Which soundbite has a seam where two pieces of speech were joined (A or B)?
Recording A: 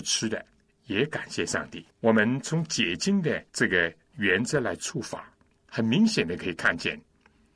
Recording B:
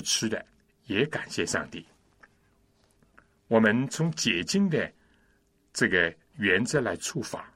A